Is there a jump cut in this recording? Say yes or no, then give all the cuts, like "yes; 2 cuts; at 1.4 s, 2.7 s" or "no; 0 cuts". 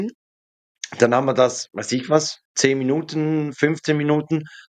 yes; 1 cut; at 2.5 s